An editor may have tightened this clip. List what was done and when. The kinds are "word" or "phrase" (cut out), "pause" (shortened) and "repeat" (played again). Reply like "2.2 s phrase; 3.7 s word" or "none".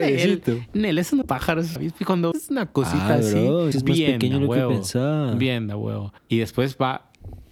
1.2 s phrase; 1.8 s word; 2.3 s word; 3.7 s word; 6.2 s pause

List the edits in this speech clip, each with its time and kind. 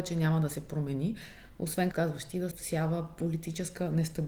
1.9 s word; 2.5 s word

